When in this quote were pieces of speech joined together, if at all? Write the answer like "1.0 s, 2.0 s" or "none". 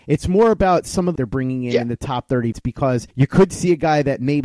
1.2 s, 2.5 s, 3.1 s